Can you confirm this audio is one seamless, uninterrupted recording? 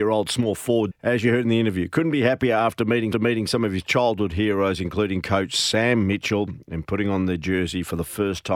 no; 2 cuts; at 0.9 s, 3.1 s

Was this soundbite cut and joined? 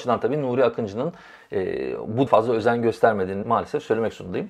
yes; 2 cuts; at 2.3 s, 3.4 s

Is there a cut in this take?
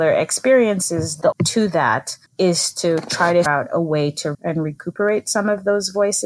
yes; 4 cuts; at 1.3 s, 2.3 s, 3.5 s, 4.3 s

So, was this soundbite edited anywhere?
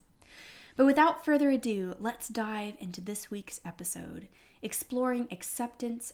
no; 0 cuts

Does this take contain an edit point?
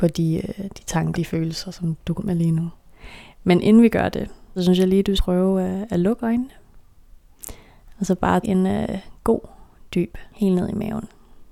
yes; 6 cuts; at 1.1 s, 2.2 s, 4.6 s, 5.2 s, 8.4 s, 10.3 s

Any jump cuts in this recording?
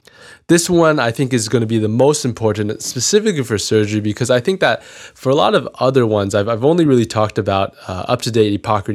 no; 0 cuts

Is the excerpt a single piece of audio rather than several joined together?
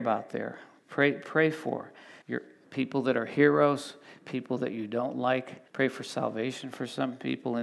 no; 2 cuts; at 2.2 s, 5.7 s

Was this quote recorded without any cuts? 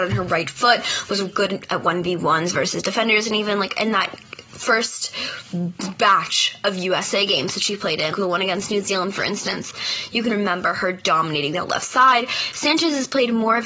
no; 3 cuts; at 1.2 s, 8.1 s, 10.3 s

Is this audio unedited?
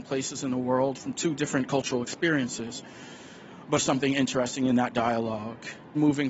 no; 1 cut; at 3.8 s

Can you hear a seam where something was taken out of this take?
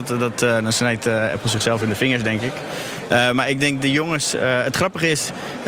no; 0 cuts

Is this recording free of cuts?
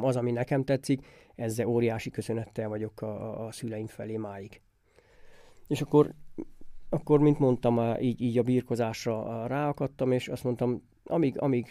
yes; 0 cuts

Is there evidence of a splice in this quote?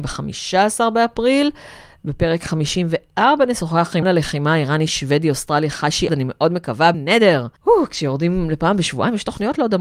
yes; 4 cuts; at 4.0 s, 6.1 s, 6.9 s, 7.6 s

